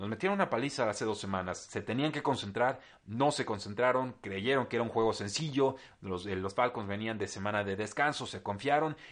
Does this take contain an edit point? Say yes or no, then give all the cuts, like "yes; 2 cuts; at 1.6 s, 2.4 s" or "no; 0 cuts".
no; 0 cuts